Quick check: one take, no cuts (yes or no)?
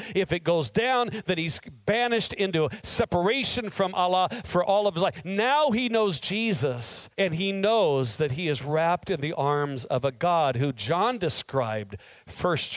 no